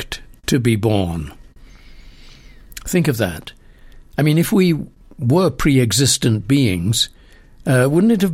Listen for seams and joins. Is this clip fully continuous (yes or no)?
yes